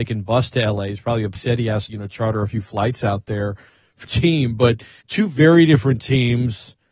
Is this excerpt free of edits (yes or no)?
no